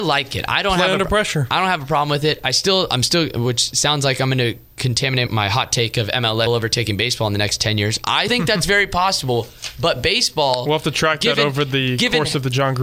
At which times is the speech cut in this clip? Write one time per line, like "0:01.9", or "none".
0:05.3
0:06.5
0:08.3